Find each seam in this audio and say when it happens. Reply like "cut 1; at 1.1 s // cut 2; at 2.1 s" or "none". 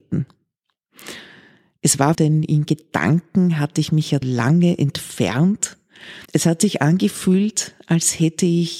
cut 1; at 2.1 s // cut 2; at 4.2 s // cut 3; at 6.2 s